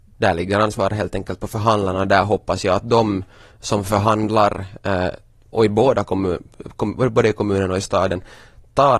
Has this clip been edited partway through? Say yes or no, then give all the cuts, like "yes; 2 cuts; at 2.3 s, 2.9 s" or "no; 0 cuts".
no; 0 cuts